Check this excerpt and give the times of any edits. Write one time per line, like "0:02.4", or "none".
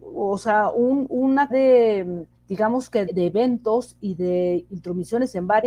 0:01.5
0:02.3
0:03.1